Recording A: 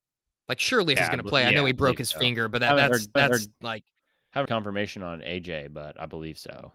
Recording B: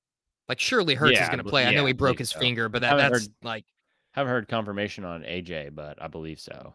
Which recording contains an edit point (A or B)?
A